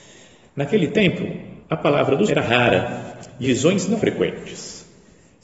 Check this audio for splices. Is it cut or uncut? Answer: cut